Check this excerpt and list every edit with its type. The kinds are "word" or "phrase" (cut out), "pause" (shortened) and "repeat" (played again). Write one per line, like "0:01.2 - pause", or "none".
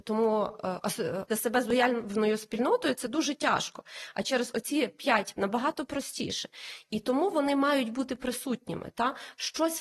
0:01.3 - word
0:05.3 - word

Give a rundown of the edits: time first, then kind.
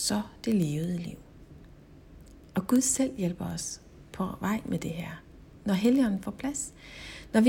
none

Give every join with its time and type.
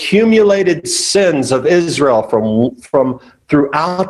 none

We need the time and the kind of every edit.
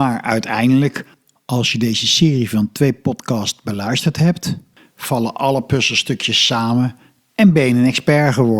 none

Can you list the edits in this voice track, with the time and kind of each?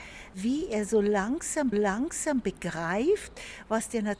0:01.7 - repeat

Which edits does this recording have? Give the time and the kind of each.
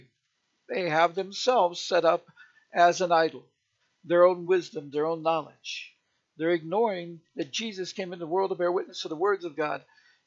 none

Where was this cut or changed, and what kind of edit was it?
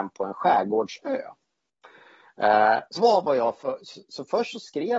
0:03.0 - word

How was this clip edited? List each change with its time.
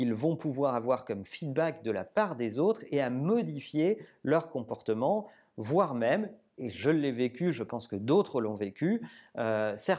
none

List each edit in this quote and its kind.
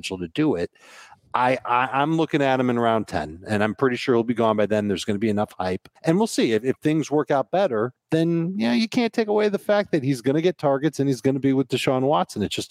0:06.0 - pause
0:08.0 - pause

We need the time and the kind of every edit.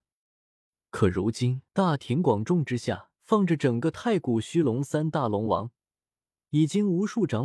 0:01.7 - pause
0:03.1 - pause

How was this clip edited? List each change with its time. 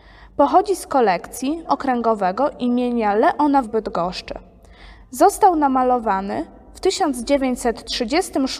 0:01.7 - word
0:03.6 - word

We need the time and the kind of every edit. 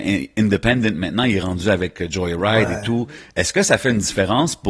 none

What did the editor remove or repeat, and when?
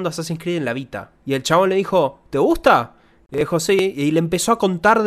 0:01.2 - pause

